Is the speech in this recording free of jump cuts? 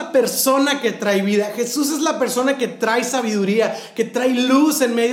yes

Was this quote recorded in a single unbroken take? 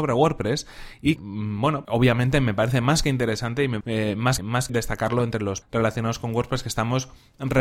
no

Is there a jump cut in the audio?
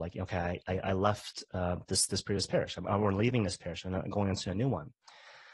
no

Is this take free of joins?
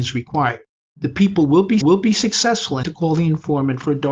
no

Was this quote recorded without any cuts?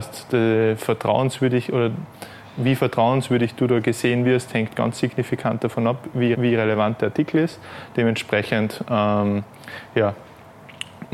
no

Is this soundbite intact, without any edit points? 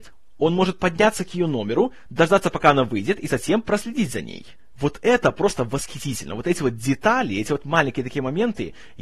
yes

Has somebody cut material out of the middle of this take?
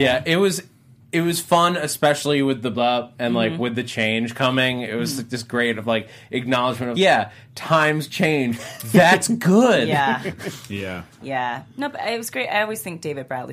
yes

